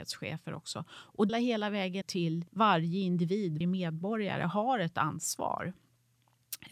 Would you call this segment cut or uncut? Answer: cut